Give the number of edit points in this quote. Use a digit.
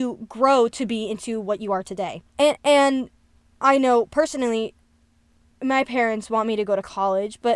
1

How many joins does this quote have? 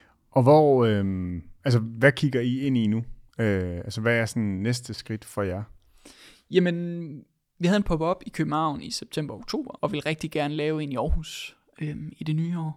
2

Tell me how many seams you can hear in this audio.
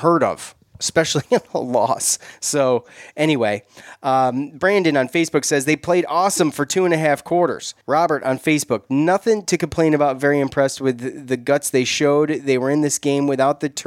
1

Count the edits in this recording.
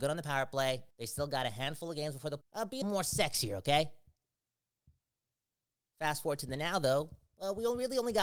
3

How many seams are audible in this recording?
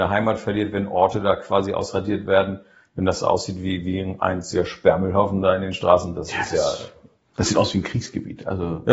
0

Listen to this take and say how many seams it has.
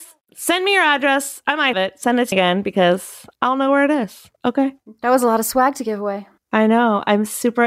2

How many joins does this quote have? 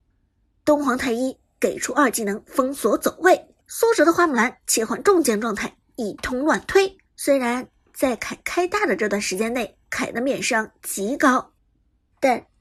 3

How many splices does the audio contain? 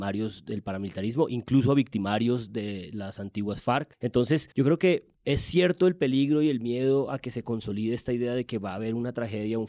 2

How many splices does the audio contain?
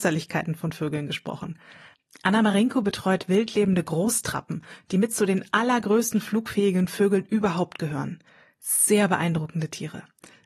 0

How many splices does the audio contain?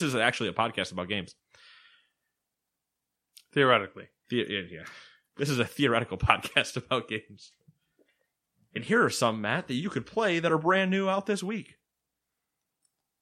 0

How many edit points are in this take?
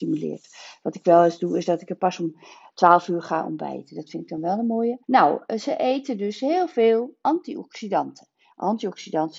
1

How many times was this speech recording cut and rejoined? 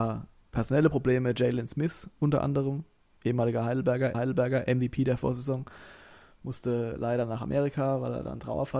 1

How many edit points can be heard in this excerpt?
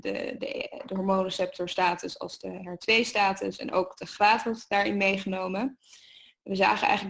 0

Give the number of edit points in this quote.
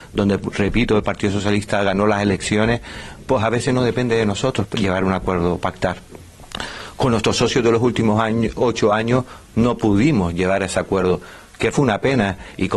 1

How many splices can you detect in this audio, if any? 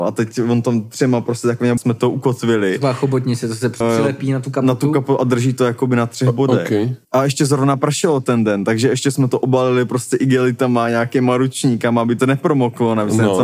4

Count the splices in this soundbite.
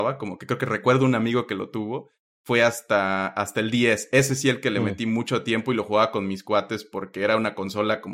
0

